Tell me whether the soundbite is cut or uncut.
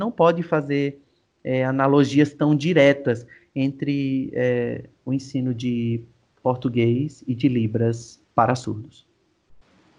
uncut